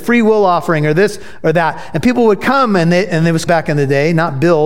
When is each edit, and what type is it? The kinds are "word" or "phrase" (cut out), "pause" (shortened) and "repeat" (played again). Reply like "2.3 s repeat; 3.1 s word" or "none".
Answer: 3.5 s word

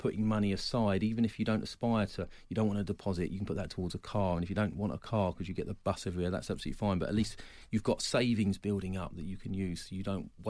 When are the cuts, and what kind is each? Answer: none

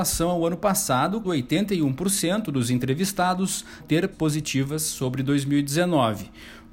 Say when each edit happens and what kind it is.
1.2 s word; 3.8 s word; 4.1 s word

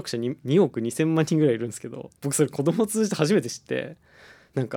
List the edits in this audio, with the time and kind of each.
2.2 s pause

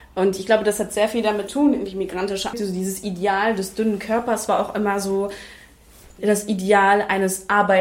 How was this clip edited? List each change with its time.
1.5 s word; 2.5 s phrase; 6.2 s word

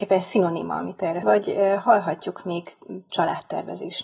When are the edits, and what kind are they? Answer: 1.2 s phrase; 3.1 s word

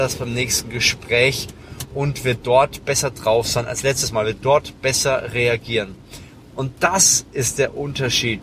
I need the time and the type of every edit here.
none

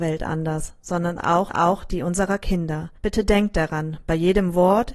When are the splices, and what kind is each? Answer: 1.5 s repeat; 3.0 s pause

